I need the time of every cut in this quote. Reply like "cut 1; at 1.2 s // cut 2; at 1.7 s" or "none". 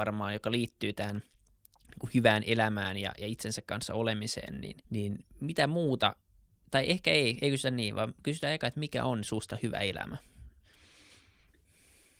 cut 1; at 4.8 s